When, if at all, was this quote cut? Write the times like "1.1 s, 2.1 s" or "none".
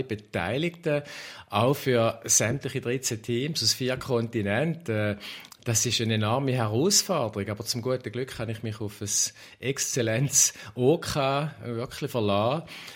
none